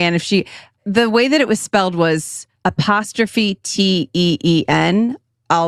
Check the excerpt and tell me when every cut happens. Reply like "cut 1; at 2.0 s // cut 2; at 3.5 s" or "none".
cut 1; at 2.6 s